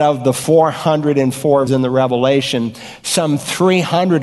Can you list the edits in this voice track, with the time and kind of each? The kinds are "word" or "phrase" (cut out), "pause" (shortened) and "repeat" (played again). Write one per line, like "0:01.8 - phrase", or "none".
0:01.7 - word